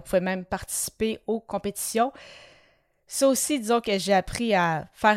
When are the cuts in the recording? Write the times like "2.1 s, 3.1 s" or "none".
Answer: none

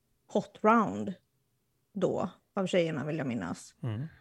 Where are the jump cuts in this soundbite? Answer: none

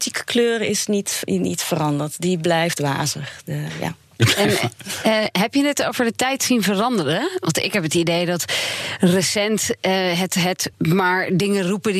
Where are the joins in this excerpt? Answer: none

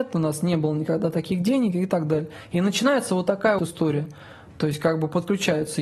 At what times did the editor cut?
3.6 s

